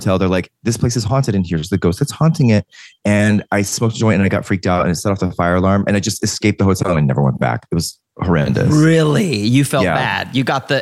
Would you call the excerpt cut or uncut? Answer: uncut